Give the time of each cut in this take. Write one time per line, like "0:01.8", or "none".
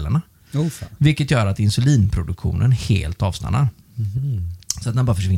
none

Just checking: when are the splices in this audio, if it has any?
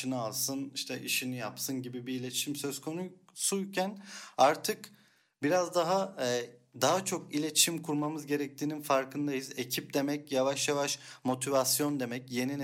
none

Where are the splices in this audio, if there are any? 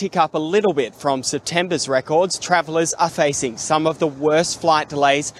0:03.1

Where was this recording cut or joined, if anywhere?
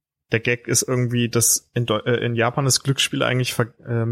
none

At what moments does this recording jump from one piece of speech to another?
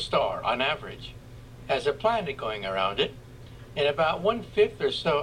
none

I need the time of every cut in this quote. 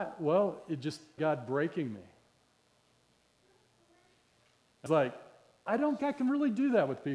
0:01.2
0:04.9
0:05.7
0:06.0

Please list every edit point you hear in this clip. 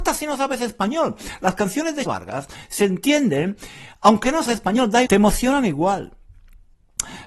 0:02.1
0:04.5
0:05.1

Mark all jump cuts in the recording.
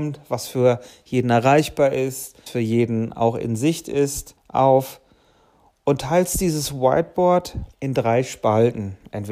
0:02.5
0:04.4
0:07.7

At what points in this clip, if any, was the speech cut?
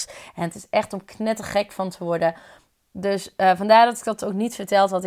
none

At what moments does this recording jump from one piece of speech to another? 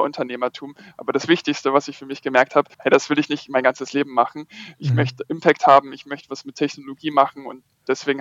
0:02.7

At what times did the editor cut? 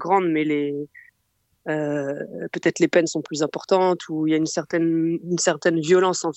none

